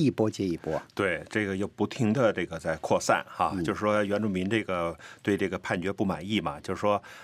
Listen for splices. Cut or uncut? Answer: uncut